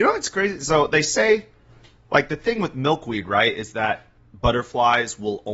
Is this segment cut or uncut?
uncut